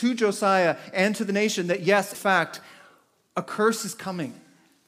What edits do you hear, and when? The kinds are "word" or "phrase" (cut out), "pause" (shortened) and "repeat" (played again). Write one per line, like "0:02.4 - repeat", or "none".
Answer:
0:02.1 - word